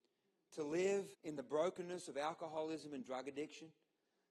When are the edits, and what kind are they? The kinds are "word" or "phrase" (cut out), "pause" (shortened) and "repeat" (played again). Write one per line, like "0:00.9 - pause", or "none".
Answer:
0:01.1 - pause